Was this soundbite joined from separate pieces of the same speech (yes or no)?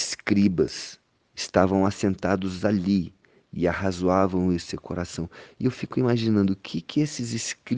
no